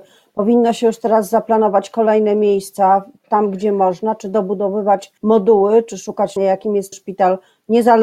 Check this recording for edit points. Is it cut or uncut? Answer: cut